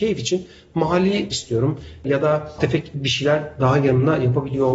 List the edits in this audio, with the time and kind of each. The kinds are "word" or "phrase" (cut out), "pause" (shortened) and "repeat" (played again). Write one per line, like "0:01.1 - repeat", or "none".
0:01.3 - phrase
0:02.6 - word